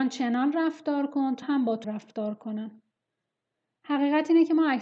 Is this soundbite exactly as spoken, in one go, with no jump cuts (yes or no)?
no